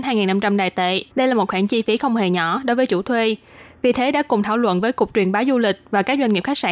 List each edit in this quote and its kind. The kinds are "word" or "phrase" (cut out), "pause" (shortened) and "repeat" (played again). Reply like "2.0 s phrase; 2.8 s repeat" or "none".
1.1 s pause